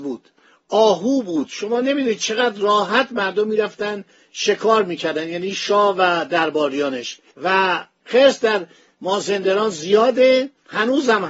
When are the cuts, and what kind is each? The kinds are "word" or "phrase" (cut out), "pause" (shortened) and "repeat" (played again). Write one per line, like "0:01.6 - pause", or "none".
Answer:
none